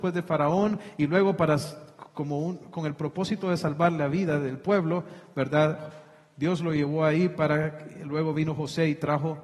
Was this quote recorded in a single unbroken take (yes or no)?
yes